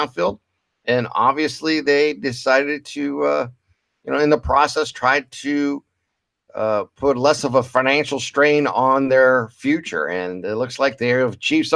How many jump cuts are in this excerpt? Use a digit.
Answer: 0